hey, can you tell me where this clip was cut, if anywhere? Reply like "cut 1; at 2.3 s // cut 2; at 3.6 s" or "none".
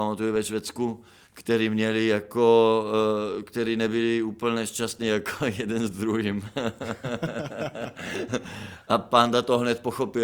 cut 1; at 1.3 s